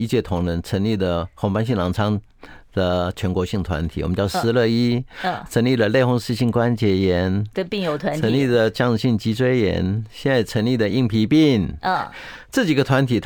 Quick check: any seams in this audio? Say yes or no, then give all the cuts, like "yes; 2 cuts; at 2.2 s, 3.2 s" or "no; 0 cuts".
no; 0 cuts